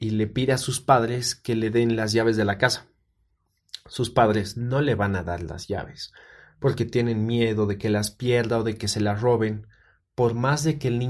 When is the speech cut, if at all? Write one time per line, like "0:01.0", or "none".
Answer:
none